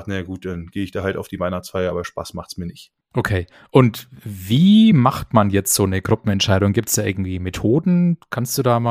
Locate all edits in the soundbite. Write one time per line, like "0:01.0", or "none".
none